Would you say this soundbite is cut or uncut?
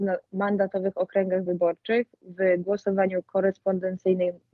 uncut